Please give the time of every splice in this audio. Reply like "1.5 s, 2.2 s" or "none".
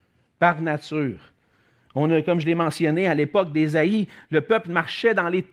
none